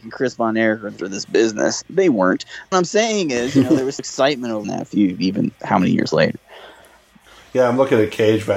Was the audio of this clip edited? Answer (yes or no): yes